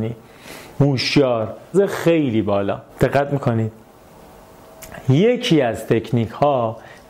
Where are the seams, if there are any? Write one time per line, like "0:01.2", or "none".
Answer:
0:01.7
0:02.9